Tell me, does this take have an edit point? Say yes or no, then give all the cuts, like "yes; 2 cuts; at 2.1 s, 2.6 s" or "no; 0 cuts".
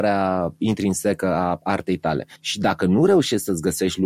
yes; 1 cut; at 2.4 s